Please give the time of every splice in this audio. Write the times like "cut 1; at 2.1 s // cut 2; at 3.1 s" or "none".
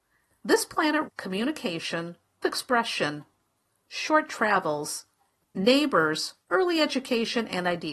cut 1; at 1.1 s // cut 2; at 2.4 s // cut 3; at 6.4 s